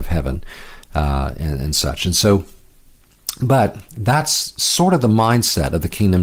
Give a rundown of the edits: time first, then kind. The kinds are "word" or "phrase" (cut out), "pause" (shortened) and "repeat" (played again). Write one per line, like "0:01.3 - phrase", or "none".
none